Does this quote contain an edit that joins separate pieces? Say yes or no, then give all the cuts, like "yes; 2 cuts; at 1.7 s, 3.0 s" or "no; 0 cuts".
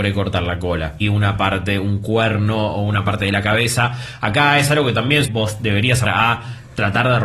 yes; 3 cuts; at 1.0 s, 5.2 s, 6.0 s